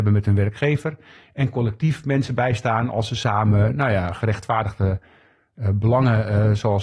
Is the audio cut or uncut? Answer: uncut